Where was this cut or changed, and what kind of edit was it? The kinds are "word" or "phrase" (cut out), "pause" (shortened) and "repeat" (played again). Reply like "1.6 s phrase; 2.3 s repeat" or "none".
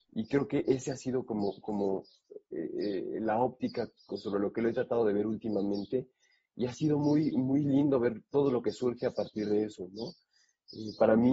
none